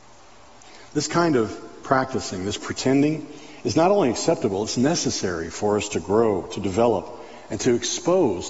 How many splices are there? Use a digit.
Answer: 0